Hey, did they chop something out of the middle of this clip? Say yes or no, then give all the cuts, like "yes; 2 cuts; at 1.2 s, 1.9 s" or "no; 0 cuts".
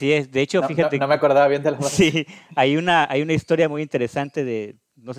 no; 0 cuts